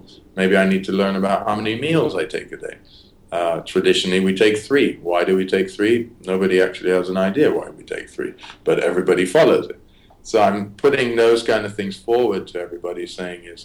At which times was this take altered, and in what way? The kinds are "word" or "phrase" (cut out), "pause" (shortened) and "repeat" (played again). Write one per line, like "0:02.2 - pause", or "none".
none